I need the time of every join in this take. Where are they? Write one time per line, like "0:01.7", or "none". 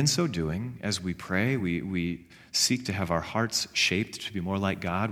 none